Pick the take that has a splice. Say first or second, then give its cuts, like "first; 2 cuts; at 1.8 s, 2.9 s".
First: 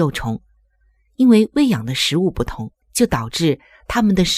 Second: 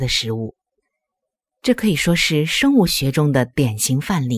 first; 1 cut; at 2.8 s